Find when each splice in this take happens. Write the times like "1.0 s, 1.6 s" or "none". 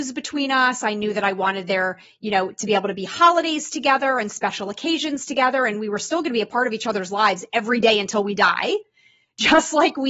none